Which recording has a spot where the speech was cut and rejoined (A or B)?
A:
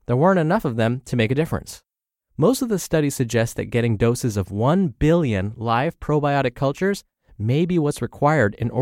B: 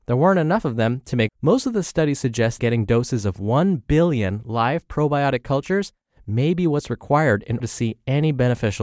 B